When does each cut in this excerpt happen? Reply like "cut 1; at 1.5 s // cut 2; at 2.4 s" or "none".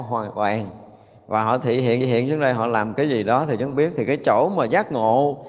cut 1; at 2.0 s // cut 2; at 3.7 s